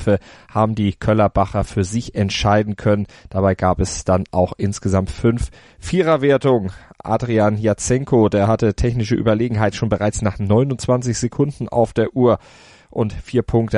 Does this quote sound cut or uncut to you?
uncut